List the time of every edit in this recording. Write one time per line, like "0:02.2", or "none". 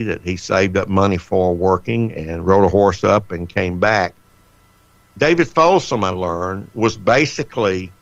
none